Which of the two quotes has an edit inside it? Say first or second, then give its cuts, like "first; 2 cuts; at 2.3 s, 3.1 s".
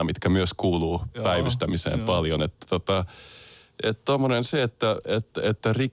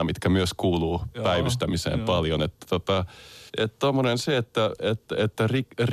second; 1 cut; at 3.5 s